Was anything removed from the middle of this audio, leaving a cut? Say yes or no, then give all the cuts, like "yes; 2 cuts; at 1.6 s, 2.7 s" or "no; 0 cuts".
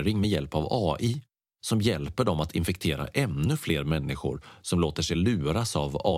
no; 0 cuts